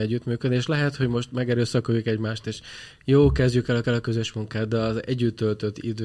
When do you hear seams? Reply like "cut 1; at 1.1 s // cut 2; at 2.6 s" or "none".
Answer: cut 1; at 3.8 s